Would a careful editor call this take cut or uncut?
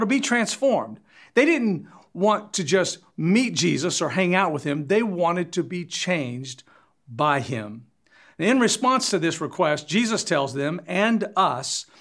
uncut